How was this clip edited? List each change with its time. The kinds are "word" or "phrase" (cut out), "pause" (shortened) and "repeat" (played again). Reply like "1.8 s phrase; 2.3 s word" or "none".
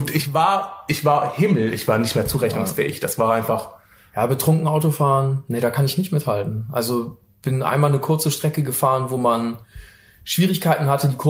none

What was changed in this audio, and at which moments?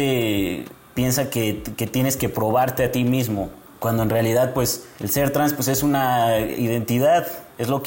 none

